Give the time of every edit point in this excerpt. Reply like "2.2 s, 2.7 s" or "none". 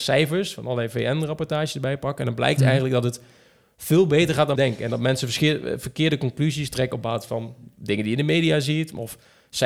4.6 s